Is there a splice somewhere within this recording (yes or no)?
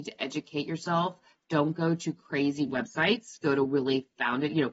no